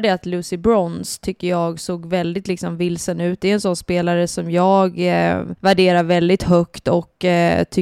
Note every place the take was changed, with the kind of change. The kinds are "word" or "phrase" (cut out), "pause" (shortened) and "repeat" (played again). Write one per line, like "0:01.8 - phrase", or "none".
0:05.6 - pause